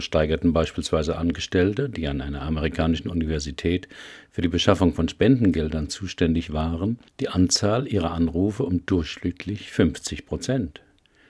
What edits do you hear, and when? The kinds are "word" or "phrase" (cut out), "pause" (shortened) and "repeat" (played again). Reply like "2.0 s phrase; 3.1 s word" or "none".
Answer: 7.1 s pause